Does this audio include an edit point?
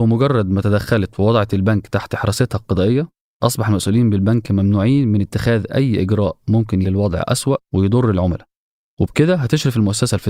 yes; 1 cut; at 6.8 s

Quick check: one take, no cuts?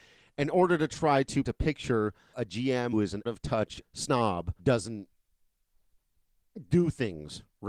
no; 6 cuts; at 1.4 s, 2.3 s, 2.9 s, 3.3 s, 3.8 s, 4.6 s

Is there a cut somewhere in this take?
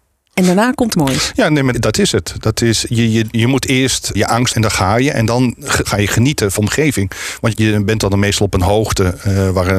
yes; 8 cuts; at 0.9 s, 1.7 s, 3.3 s, 4.1 s, 4.5 s, 5.8 s, 6.6 s, 7.5 s

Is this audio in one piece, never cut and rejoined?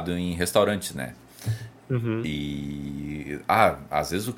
yes; 0 cuts

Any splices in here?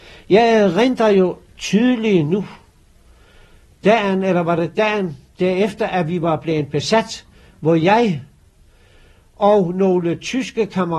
no; 0 cuts

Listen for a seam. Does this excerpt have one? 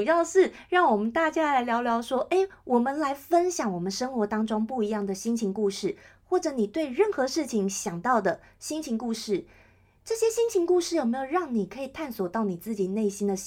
no; 0 cuts

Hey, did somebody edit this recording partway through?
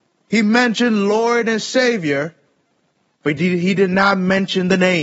no; 0 cuts

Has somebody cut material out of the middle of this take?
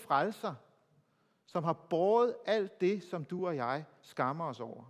no; 0 cuts

